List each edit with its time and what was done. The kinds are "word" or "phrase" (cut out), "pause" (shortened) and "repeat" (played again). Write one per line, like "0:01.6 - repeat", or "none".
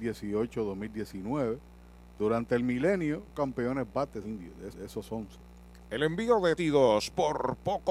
0:03.3 - word
0:04.2 - phrase
0:04.7 - repeat
0:06.6 - word